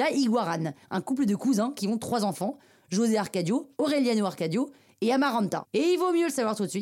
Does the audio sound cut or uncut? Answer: uncut